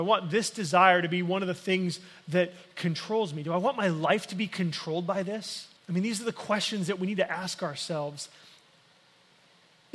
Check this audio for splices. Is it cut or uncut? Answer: cut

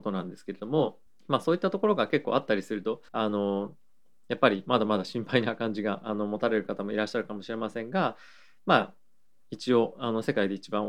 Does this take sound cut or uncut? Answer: cut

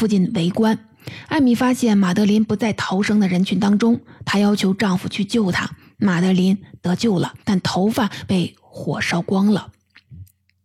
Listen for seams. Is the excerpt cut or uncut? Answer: cut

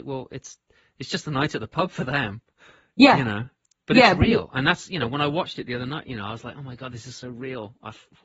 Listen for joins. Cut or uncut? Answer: uncut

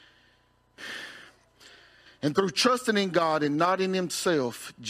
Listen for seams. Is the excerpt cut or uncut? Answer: uncut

